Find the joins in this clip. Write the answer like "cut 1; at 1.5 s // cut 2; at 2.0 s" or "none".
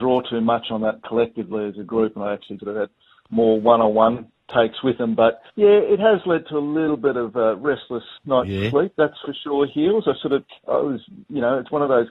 cut 1; at 2.6 s // cut 2; at 5.5 s // cut 3; at 8.2 s // cut 4; at 10.6 s

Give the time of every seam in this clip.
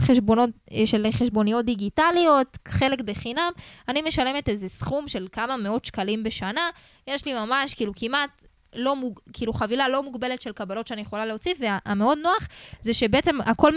none

